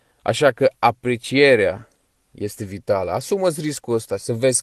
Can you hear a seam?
no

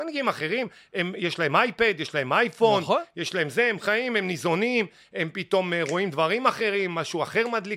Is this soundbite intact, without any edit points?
yes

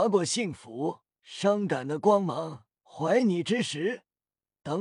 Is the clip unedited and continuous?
no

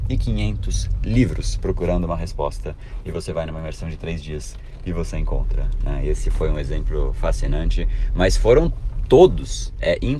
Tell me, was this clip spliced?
no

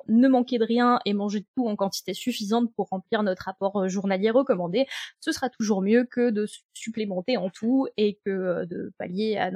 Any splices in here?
no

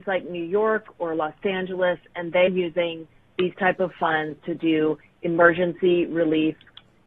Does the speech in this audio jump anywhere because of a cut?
yes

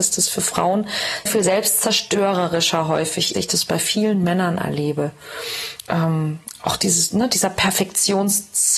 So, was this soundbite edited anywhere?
yes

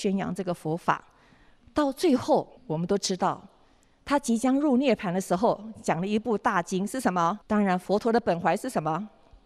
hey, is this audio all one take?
no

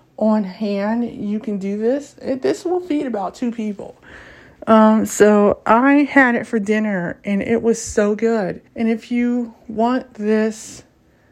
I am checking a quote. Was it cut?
yes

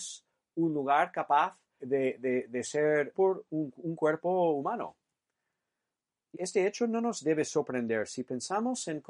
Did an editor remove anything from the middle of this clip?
yes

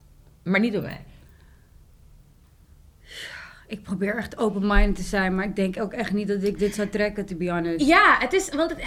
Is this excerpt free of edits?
yes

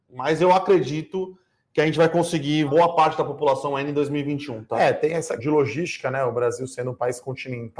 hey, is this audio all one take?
no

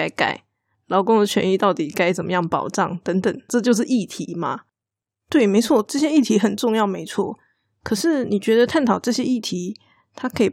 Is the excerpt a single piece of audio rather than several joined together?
no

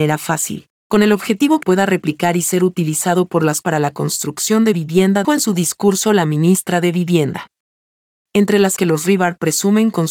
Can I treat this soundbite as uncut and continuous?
no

